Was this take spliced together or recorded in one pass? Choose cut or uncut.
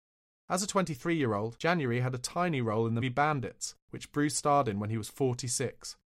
cut